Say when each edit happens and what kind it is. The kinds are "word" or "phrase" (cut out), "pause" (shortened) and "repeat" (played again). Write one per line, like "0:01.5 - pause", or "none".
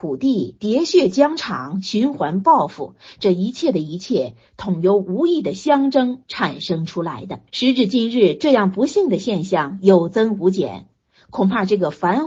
0:07.5 - pause